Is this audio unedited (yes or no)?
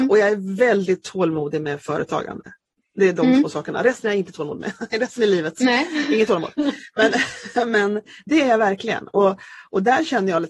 yes